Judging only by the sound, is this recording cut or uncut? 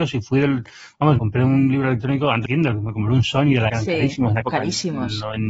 cut